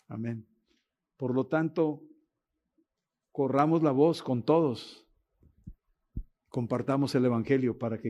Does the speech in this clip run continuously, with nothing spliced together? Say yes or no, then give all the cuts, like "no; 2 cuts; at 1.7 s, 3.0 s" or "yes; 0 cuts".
yes; 0 cuts